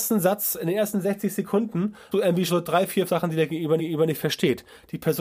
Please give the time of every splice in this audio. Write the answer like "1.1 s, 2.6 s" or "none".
2.1 s, 2.5 s, 3.1 s, 3.8 s